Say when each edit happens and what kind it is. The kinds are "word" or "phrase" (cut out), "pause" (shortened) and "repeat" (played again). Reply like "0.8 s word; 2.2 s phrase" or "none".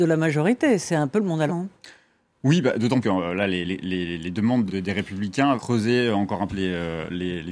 1.5 s word; 3.0 s word; 3.6 s word; 4.7 s word; 5.6 s word; 6.5 s word